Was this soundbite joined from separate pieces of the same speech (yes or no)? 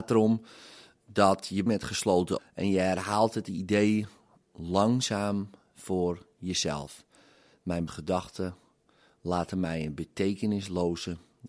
yes